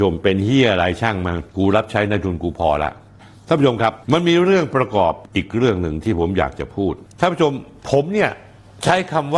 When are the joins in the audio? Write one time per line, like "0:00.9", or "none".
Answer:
0:01.5
0:04.0